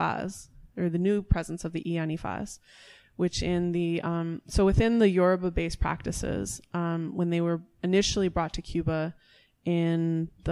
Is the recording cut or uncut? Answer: uncut